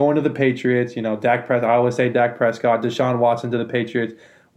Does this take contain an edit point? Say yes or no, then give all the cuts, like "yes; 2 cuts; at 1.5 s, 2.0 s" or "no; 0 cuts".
no; 0 cuts